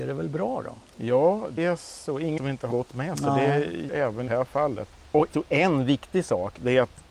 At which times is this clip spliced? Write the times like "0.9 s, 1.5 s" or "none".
1.6 s, 2.4 s, 2.7 s, 3.9 s, 4.3 s, 5.3 s